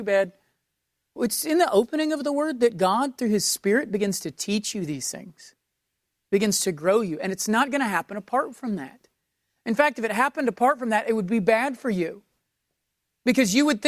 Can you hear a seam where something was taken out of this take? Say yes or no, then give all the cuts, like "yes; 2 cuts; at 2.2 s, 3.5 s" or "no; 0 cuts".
no; 0 cuts